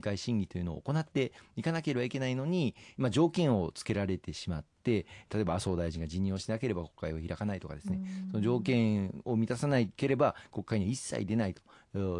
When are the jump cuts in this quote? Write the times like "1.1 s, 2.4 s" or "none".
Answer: none